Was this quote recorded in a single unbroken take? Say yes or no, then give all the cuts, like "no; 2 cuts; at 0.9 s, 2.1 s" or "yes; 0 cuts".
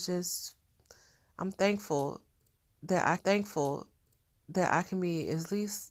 no; 1 cut; at 3.2 s